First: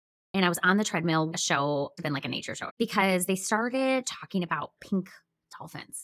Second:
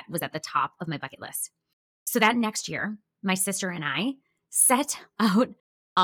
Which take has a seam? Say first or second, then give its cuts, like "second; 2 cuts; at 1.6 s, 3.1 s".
first; 3 cuts; at 1.3 s, 2.0 s, 2.7 s